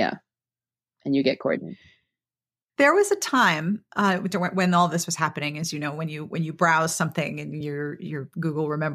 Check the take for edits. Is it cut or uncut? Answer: uncut